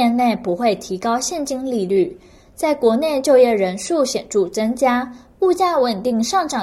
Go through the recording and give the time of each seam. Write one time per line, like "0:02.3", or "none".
none